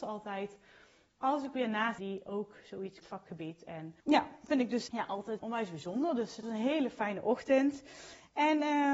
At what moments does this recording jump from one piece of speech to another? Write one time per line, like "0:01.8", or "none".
0:02.0
0:03.0
0:04.0
0:04.9
0:05.4
0:06.4